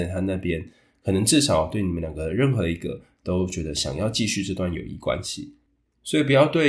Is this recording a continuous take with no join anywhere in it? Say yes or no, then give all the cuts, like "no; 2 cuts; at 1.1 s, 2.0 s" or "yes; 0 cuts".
yes; 0 cuts